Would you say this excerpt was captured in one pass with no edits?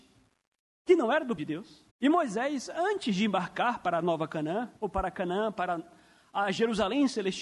no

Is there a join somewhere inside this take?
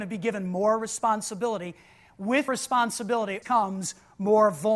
yes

